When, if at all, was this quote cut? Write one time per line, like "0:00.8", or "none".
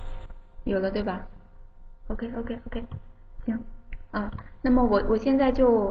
none